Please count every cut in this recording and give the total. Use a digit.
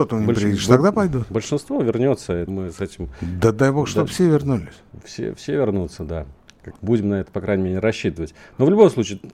2